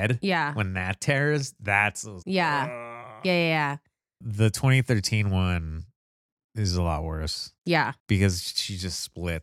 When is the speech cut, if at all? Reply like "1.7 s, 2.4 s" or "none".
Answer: 2.2 s